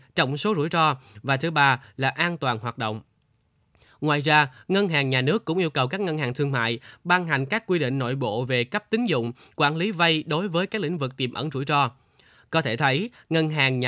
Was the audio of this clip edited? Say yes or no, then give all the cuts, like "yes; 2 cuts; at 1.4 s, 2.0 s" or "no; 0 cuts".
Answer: no; 0 cuts